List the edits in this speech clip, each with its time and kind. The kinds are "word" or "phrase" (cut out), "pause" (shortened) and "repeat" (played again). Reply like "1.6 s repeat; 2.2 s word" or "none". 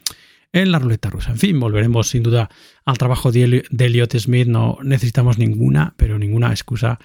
none